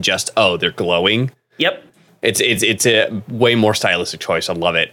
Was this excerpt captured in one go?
yes; 0 cuts

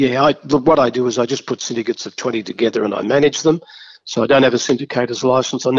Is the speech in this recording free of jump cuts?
yes; 0 cuts

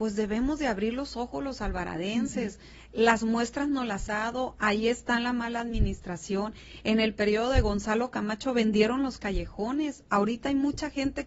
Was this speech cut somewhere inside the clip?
yes; 1 cut; at 4.1 s

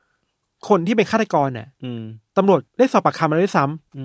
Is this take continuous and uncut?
no; 1 cut; at 2.7 s

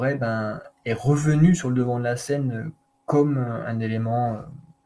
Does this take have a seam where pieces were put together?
no; 0 cuts

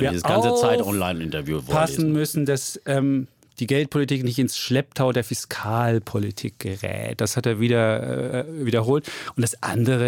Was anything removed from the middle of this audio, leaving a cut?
no; 0 cuts

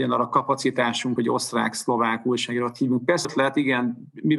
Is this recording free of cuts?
no; 2 cuts; at 1.2 s, 3.2 s

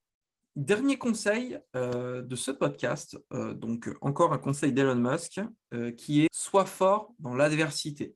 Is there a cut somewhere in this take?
yes; 1 cut; at 6.3 s

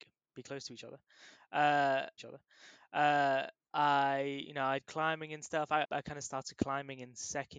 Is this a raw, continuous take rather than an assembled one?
no; 3 cuts; at 2.2 s, 4.8 s, 5.8 s

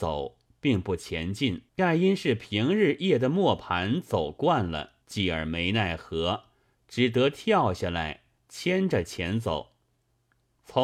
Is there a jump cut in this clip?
yes; 3 cuts; at 1.7 s, 5.0 s, 8.4 s

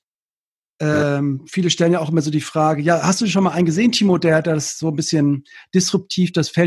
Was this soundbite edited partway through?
no; 0 cuts

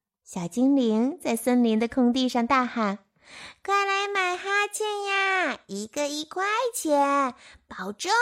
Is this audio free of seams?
yes; 0 cuts

